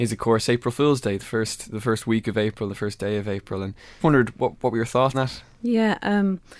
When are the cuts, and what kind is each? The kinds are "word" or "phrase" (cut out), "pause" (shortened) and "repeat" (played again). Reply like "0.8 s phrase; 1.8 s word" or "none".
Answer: 4.0 s word; 5.1 s word